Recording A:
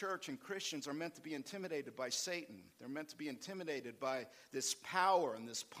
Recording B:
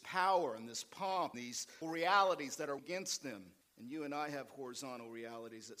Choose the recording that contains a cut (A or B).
B